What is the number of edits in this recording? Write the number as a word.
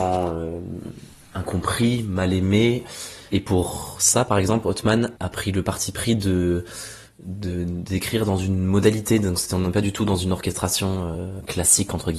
zero